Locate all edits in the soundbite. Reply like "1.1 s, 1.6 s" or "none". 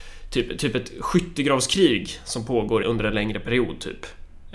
2.8 s